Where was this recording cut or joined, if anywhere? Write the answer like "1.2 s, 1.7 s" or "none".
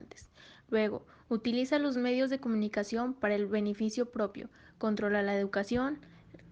none